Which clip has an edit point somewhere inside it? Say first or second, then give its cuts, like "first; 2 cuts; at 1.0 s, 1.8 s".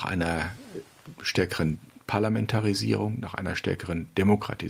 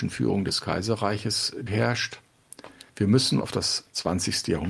second; 3 cuts; at 1.7 s, 2.9 s, 3.4 s